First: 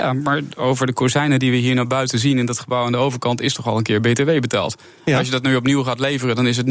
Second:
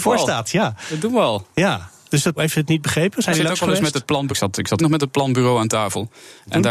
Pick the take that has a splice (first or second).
second